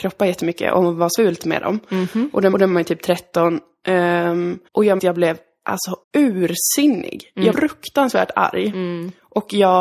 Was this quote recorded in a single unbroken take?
no; 6 cuts; at 1.2 s, 2.5 s, 4.7 s, 5.0 s, 6.0 s, 7.5 s

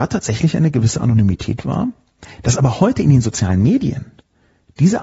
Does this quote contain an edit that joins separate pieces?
no; 0 cuts

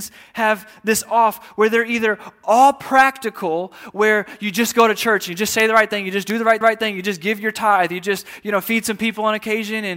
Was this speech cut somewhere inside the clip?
yes; 1 cut; at 6.6 s

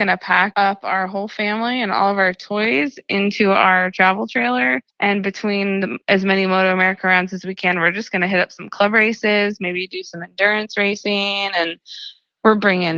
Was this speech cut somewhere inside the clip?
no; 0 cuts

